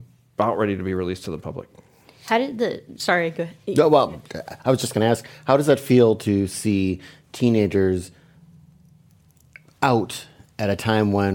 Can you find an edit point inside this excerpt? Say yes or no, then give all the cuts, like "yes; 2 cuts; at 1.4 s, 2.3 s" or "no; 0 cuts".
no; 0 cuts